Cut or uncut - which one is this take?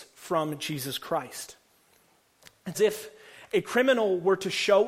cut